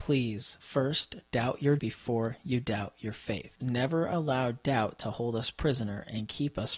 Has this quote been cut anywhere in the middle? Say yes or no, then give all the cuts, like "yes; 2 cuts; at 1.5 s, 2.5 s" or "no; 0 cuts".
yes; 2 cuts; at 1.8 s, 3.6 s